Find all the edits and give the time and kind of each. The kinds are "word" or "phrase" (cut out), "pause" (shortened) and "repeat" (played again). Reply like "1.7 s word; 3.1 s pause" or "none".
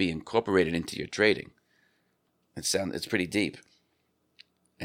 none